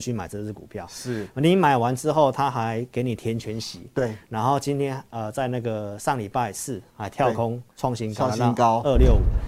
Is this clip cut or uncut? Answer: cut